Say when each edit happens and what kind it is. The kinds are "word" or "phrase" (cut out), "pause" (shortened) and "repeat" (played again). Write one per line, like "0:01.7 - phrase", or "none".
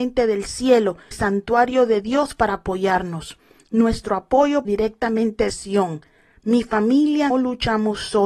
0:01.1 - word
0:04.7 - word
0:05.5 - word
0:07.3 - word